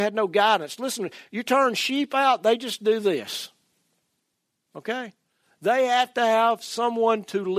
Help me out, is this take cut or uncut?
uncut